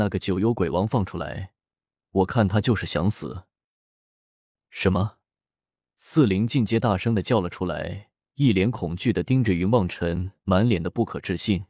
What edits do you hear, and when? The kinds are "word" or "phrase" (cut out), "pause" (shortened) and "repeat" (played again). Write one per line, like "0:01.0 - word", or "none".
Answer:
none